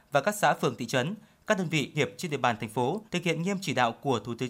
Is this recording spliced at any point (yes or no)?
yes